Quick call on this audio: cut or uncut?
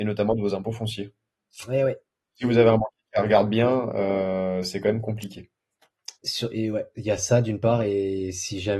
uncut